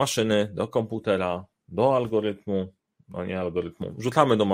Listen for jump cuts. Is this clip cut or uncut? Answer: uncut